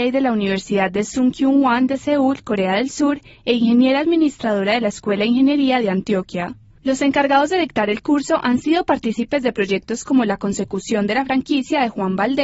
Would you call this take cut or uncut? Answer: uncut